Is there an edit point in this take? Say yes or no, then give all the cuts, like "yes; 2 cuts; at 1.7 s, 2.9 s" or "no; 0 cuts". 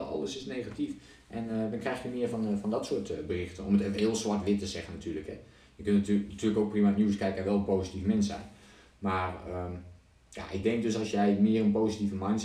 no; 0 cuts